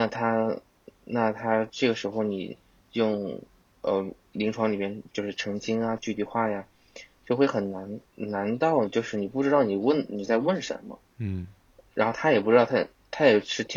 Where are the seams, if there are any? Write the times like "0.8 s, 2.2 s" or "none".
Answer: 8.1 s